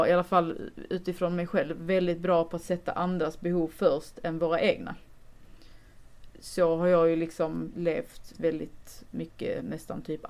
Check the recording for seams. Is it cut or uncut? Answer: cut